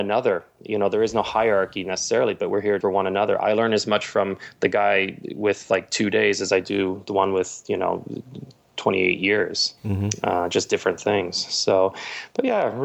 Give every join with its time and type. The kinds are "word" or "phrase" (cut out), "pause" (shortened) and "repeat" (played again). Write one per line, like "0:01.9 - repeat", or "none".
0:02.8 - word
0:09.8 - pause

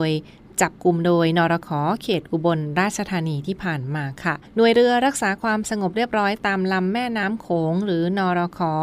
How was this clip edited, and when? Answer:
0:04.5 - pause

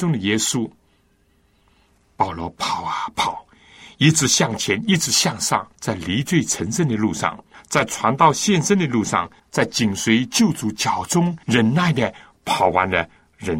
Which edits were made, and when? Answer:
0:05.7 - pause
0:07.5 - pause
0:09.4 - pause
0:11.4 - pause

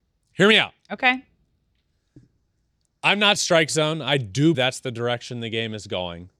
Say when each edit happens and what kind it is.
0:03.4 - phrase
0:04.5 - word

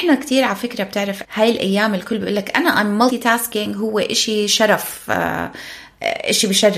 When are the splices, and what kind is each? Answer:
0:01.2 - word
0:03.1 - phrase

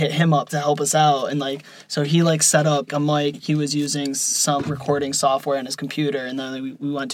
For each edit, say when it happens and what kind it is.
0:02.9 - word
0:03.3 - word
0:04.6 - word

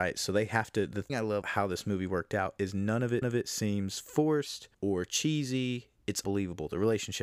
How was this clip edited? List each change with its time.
0:01.1 - phrase
0:01.4 - word
0:03.2 - repeat
0:04.7 - pause
0:06.2 - word

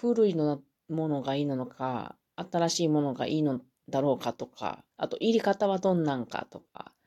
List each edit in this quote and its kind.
0:04.9 - pause

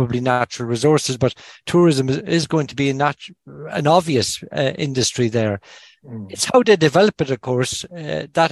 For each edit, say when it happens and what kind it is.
none

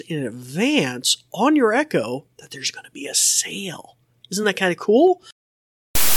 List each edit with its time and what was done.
none

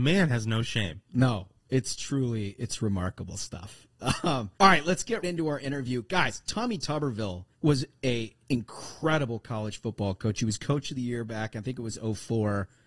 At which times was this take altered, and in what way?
0:04.5 - pause
0:05.2 - word
0:07.5 - pause

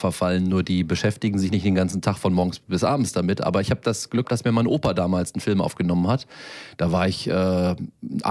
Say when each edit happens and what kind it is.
0:04.2 - word

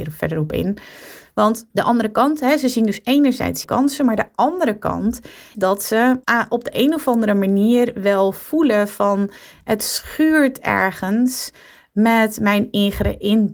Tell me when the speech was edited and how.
0:01.7 - pause
0:03.6 - phrase
0:05.5 - word
0:06.2 - pause

